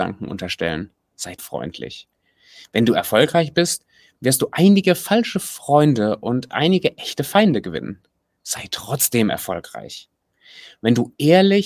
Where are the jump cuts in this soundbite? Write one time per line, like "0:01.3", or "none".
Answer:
0:01.4